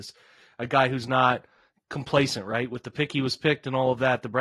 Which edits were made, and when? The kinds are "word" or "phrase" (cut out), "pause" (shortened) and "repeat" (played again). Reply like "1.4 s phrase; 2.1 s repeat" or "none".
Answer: none